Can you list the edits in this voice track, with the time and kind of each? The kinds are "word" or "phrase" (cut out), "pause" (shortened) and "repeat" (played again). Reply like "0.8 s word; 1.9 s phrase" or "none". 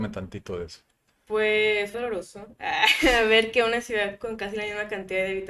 1.9 s word